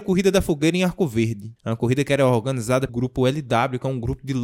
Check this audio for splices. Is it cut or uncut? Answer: cut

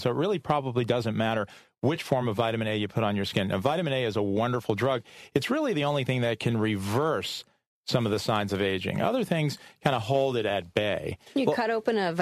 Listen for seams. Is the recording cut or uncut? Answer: uncut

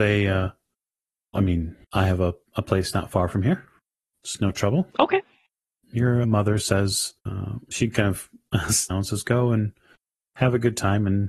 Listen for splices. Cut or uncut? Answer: cut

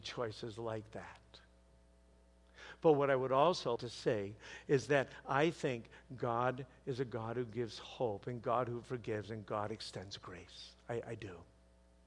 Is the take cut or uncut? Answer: cut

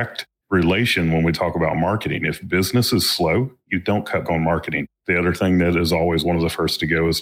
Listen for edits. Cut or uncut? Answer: cut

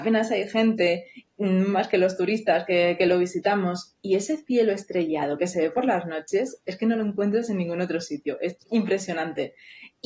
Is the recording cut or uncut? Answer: cut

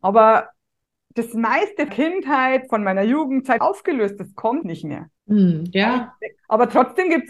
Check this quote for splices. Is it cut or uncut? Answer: cut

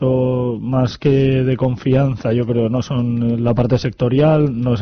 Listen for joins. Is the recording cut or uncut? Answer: uncut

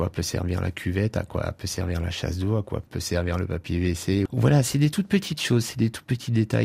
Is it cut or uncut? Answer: uncut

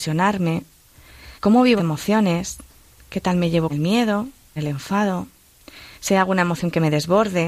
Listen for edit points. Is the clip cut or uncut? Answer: cut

